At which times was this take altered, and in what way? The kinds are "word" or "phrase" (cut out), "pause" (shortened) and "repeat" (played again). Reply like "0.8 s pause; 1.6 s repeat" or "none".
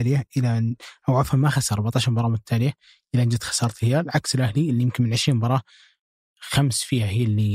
none